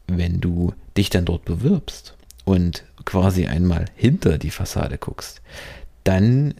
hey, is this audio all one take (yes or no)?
yes